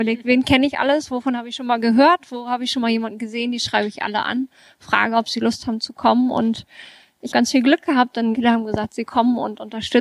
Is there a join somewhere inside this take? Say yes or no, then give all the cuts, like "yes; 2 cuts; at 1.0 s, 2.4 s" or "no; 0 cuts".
yes; 2 cuts; at 7.3 s, 8.3 s